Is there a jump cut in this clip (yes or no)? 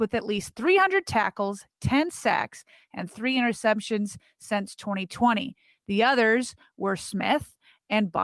no